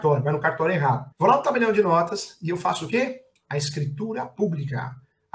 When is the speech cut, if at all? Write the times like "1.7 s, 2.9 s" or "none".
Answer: 1.1 s, 3.4 s